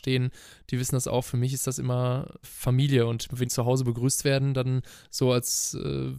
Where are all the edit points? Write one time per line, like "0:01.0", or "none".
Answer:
0:02.4
0:03.4